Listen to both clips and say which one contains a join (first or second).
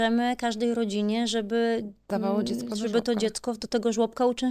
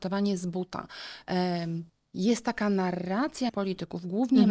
second